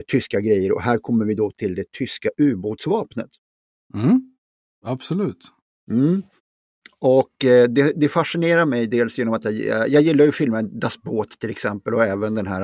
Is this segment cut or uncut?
uncut